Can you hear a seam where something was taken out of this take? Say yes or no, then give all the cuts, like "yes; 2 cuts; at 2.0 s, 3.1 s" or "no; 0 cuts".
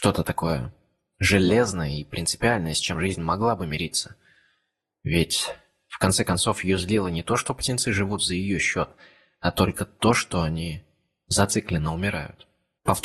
no; 0 cuts